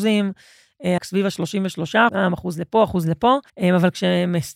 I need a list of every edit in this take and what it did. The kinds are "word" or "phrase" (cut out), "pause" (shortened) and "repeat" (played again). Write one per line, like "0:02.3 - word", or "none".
0:01.0 - word
0:02.1 - word
0:03.5 - pause